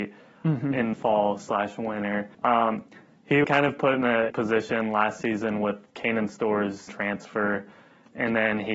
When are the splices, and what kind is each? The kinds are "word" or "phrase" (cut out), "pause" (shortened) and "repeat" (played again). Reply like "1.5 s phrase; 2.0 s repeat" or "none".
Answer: 0.9 s word; 2.3 s pause; 3.4 s word; 4.3 s word; 6.9 s word